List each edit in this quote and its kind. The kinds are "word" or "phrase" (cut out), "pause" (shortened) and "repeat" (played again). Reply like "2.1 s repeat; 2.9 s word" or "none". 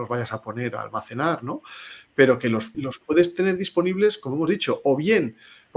2.7 s word